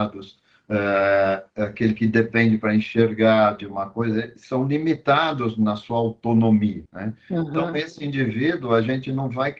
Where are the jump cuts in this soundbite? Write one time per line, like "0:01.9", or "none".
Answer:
0:01.5
0:06.9